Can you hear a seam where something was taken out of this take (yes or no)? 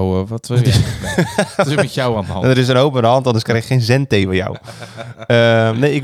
no